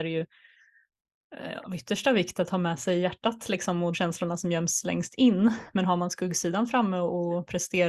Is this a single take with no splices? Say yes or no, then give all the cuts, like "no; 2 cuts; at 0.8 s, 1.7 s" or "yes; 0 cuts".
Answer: no; 1 cut; at 3.9 s